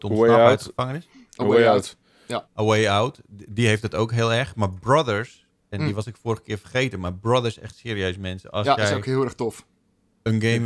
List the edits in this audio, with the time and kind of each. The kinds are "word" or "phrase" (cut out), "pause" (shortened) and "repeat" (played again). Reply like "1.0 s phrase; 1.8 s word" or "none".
2.4 s pause